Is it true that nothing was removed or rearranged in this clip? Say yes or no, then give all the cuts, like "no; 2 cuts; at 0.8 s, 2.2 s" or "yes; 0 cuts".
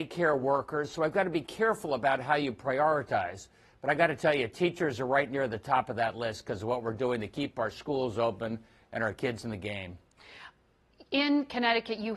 yes; 0 cuts